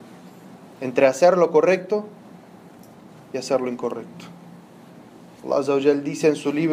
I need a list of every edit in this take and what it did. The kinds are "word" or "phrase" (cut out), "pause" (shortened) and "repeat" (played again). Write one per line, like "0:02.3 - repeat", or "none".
none